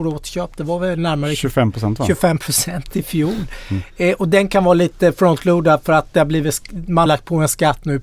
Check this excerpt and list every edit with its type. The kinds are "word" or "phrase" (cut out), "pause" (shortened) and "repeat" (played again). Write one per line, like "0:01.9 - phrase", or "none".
0:07.1 - word